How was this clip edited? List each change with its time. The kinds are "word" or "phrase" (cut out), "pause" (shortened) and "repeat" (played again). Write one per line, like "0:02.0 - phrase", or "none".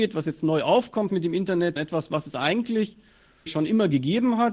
0:01.1 - word
0:01.8 - word
0:03.5 - word